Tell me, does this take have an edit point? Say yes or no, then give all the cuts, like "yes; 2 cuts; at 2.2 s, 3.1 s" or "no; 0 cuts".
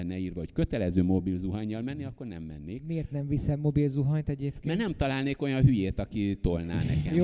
no; 0 cuts